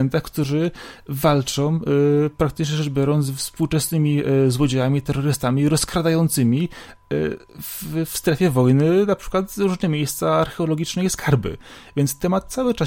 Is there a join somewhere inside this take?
no; 0 cuts

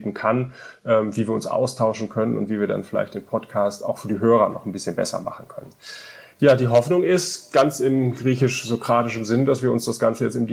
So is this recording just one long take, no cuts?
yes; 0 cuts

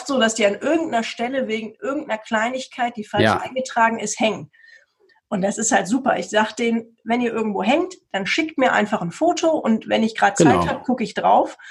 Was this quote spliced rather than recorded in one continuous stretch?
no; 0 cuts

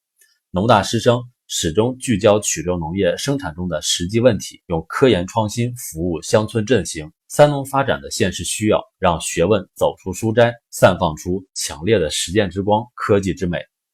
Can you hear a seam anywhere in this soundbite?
yes; 4 cuts; at 4.6 s, 7.2 s, 8.9 s, 10.6 s

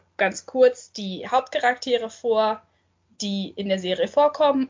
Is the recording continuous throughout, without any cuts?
yes; 0 cuts

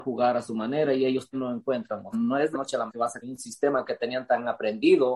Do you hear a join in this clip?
yes; 5 cuts; at 1.3 s, 2.1 s, 2.5 s, 2.9 s, 3.2 s

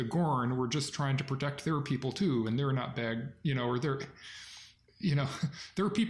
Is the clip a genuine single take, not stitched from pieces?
yes; 0 cuts

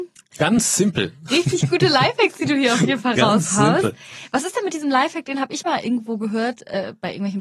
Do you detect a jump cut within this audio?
no; 0 cuts

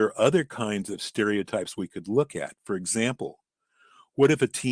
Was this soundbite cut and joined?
no; 0 cuts

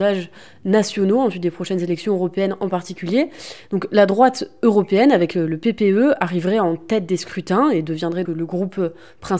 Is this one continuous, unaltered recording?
no; 1 cut; at 8.2 s

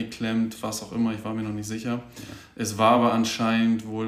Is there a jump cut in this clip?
no; 0 cuts

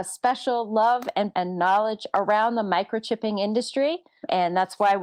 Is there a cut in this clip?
yes; 1 cut; at 1.3 s

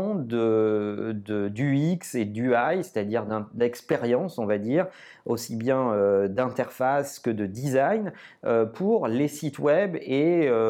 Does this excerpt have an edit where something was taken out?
no; 0 cuts

